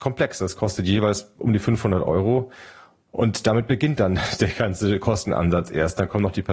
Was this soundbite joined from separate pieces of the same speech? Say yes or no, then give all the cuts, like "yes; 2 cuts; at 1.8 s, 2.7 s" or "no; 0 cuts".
no; 0 cuts